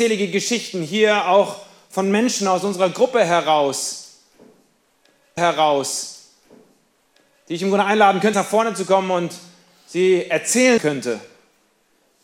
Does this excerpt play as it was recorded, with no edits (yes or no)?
no